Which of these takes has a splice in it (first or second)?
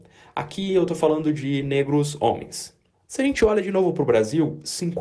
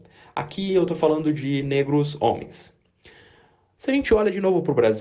first